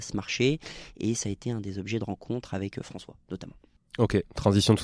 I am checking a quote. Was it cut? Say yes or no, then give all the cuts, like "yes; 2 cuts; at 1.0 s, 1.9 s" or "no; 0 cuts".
no; 0 cuts